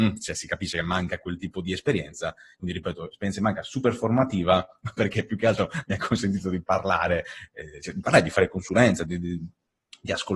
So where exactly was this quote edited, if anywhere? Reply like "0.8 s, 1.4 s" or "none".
9.0 s